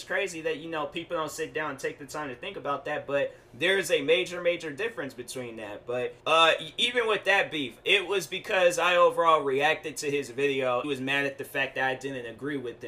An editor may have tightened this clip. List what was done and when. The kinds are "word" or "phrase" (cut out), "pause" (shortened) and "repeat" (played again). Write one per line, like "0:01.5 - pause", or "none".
0:06.2 - pause
0:10.8 - phrase